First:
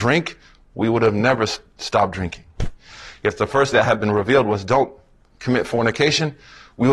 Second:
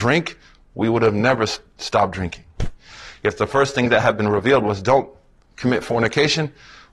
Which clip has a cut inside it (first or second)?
first